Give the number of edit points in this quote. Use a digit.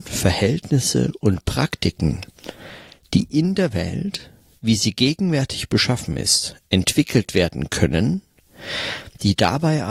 0